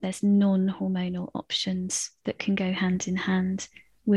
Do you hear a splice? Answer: no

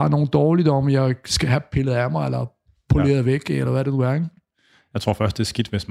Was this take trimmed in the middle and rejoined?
no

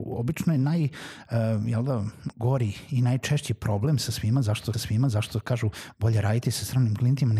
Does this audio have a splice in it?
yes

